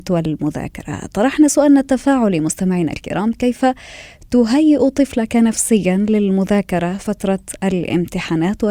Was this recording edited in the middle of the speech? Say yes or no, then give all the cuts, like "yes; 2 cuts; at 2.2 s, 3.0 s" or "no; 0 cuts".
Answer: no; 0 cuts